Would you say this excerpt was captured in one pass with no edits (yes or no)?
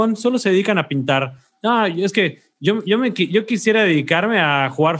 yes